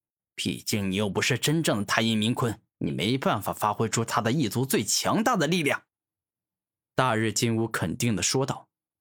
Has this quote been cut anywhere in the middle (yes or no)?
yes